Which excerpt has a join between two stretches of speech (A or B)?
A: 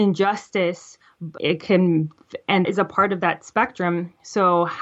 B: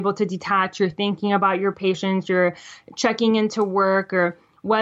A